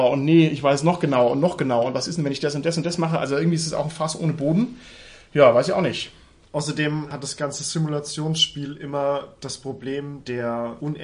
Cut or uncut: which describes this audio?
uncut